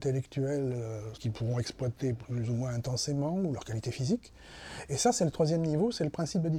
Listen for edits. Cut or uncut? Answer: cut